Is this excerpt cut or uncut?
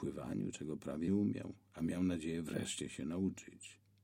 cut